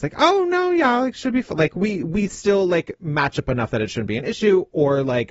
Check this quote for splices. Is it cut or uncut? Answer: uncut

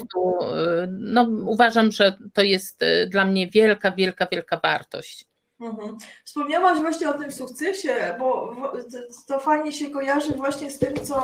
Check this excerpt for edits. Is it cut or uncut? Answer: uncut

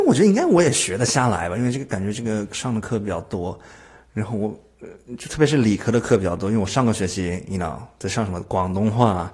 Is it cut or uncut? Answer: uncut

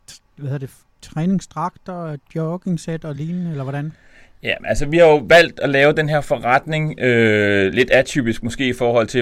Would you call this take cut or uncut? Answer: uncut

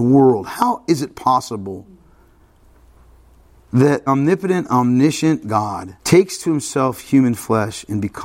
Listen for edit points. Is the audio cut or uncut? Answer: cut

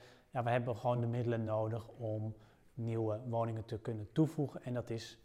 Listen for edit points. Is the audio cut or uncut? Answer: uncut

